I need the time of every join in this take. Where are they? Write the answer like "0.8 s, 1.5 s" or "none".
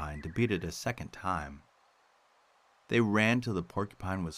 none